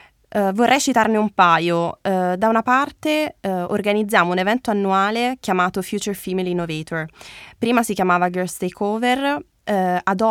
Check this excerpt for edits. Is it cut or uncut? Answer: uncut